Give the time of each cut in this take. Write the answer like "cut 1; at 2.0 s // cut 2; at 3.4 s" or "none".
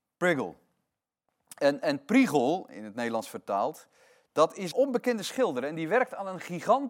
cut 1; at 4.7 s